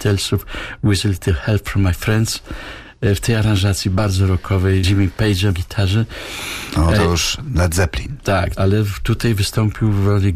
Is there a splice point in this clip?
yes; 2 cuts; at 4.8 s, 5.5 s

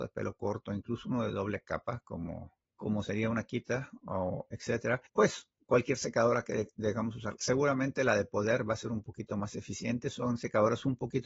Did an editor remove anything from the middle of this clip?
yes; 2 cuts; at 2.7 s, 5.1 s

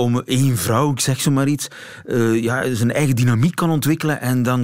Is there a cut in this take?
no; 0 cuts

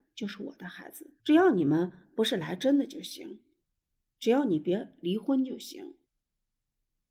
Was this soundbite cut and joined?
yes; 2 cuts; at 1.2 s, 6.1 s

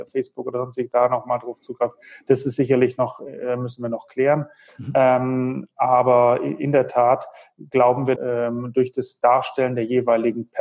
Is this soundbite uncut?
no; 1 cut; at 8.2 s

